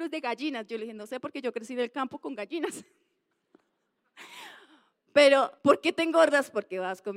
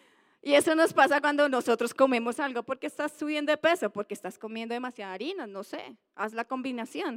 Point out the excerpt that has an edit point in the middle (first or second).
first